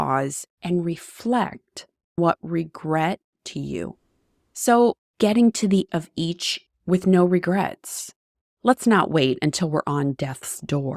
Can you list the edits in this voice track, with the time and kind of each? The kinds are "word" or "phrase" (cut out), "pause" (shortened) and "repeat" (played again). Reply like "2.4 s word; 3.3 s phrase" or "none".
2.2 s word; 3.3 s word; 5.1 s word; 5.9 s word; 6.7 s word; 8.4 s word